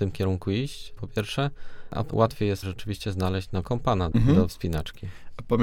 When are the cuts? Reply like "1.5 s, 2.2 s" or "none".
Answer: 1.0 s, 2.1 s, 2.6 s, 3.6 s, 4.1 s, 4.5 s